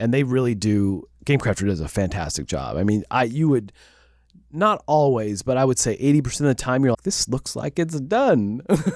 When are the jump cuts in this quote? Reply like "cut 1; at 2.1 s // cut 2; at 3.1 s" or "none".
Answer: cut 1; at 6.9 s